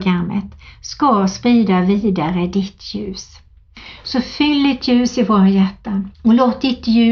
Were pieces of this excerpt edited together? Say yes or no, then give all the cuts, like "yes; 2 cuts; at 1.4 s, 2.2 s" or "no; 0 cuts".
yes; 1 cut; at 6.1 s